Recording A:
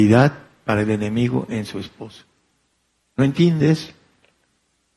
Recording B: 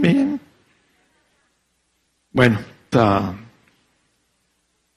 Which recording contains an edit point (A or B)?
B